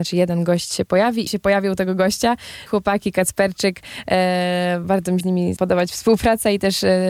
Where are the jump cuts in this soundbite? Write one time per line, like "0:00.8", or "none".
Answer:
0:01.3
0:02.7
0:04.8
0:05.2
0:05.6